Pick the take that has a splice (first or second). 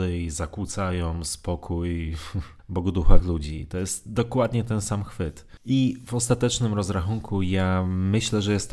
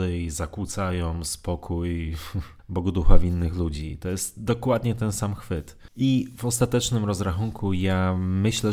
first